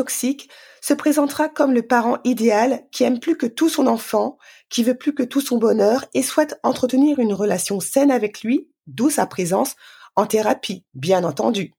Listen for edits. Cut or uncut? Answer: uncut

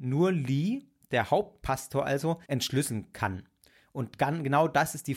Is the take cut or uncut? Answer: cut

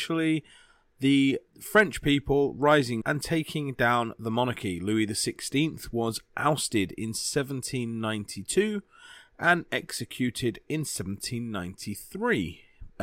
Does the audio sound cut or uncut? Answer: cut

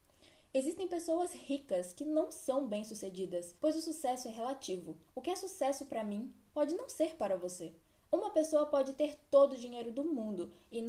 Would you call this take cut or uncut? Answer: cut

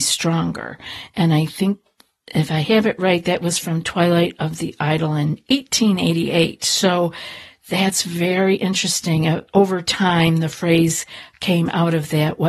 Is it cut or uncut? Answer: uncut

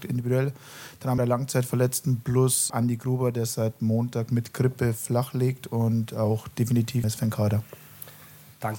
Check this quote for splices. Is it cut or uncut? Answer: cut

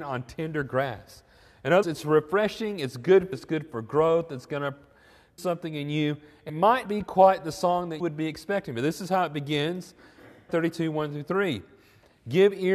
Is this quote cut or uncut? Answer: cut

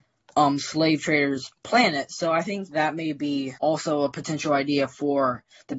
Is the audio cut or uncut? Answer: cut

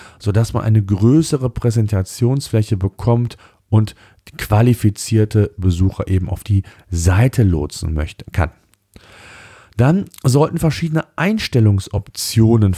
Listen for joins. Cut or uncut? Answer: uncut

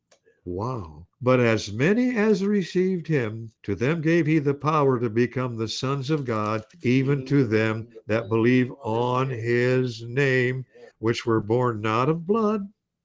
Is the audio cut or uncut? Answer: cut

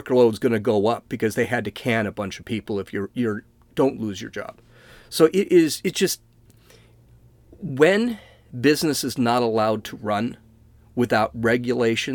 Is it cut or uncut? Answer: uncut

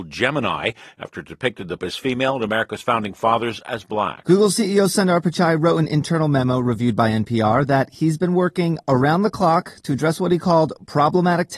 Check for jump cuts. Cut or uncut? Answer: cut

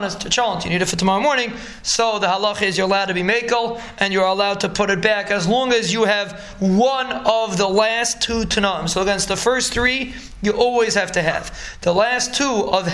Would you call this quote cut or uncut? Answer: uncut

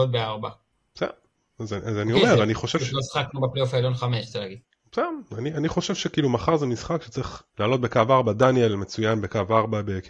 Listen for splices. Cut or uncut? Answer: cut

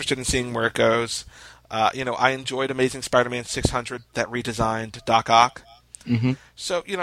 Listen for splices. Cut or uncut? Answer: uncut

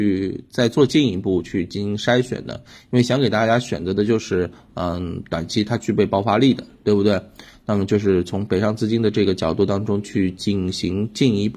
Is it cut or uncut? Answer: uncut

